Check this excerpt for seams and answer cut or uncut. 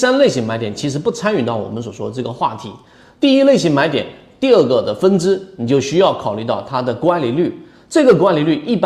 uncut